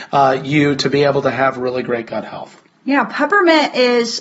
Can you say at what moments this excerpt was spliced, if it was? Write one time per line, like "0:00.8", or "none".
none